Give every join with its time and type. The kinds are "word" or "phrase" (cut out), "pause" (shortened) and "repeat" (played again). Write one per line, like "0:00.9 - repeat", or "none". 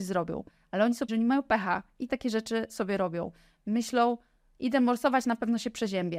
0:01.1 - word
0:02.1 - word